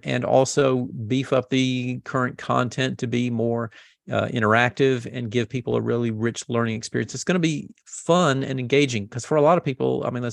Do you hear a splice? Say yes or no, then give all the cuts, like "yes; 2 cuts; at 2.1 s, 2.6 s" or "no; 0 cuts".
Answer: no; 0 cuts